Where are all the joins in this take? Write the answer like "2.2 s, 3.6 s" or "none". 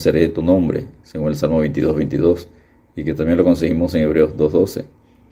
none